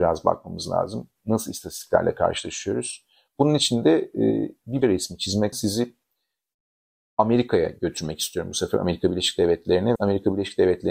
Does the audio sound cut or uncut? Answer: cut